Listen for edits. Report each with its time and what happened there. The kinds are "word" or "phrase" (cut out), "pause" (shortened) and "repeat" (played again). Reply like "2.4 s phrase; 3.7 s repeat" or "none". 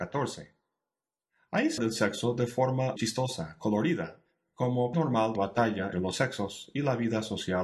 1.8 s word; 3.0 s word; 4.9 s word; 5.4 s word; 5.9 s word